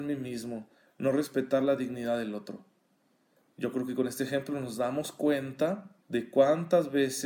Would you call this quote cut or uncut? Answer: cut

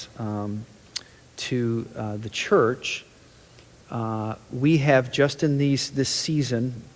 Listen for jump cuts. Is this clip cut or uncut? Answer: uncut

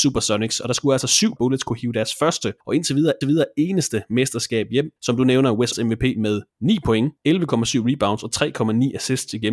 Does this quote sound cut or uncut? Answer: cut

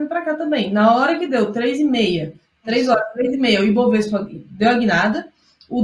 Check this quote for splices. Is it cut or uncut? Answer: uncut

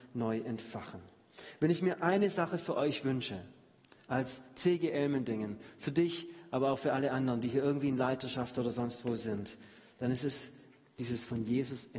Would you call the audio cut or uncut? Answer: uncut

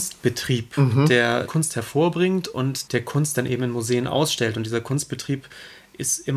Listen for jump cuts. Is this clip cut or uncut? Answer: cut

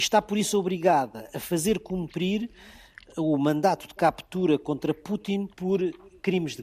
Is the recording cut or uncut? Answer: cut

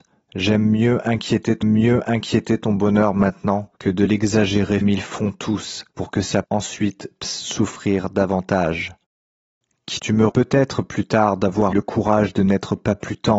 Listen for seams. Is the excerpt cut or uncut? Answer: cut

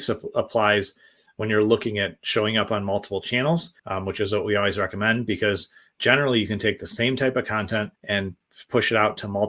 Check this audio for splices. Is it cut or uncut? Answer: cut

